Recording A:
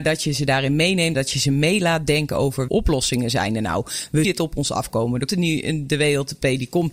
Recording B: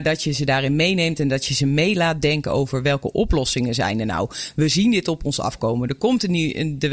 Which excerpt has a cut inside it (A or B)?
A